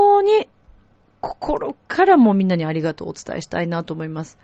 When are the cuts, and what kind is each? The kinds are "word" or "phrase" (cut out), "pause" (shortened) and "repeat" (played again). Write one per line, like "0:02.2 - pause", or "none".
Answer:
none